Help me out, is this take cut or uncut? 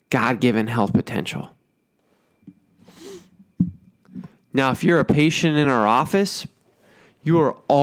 uncut